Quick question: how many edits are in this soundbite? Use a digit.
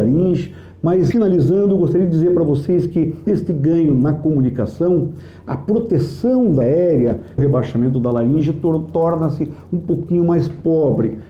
4